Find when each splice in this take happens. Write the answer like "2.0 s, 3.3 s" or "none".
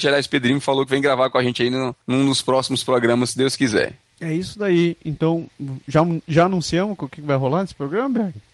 2.0 s